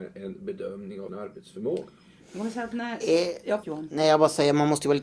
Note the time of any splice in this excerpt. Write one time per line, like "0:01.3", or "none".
0:01.1
0:03.6